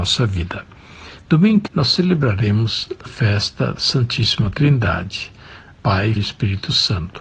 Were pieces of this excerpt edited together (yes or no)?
yes